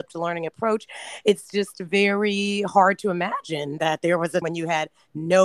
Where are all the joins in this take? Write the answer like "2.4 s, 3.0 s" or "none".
4.4 s